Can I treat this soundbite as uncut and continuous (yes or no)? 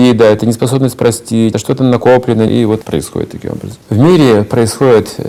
no